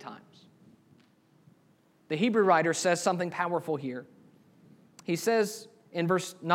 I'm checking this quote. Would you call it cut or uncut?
uncut